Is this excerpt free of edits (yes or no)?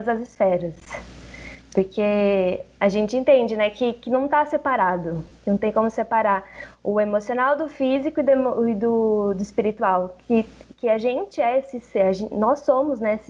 yes